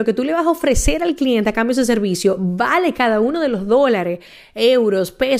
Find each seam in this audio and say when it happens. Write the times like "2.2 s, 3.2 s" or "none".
none